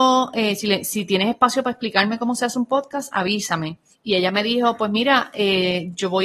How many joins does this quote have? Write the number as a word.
one